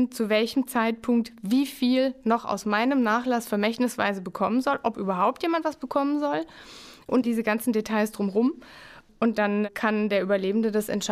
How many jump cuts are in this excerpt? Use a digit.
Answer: 1